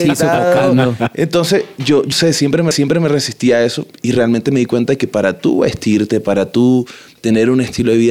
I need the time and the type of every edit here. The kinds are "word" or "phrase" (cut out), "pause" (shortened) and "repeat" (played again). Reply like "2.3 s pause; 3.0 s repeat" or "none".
2.1 s word; 2.7 s repeat